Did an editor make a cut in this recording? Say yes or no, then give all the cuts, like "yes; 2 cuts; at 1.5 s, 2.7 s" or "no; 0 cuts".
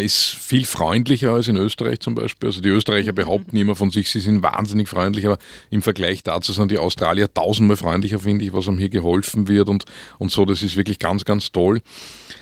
no; 0 cuts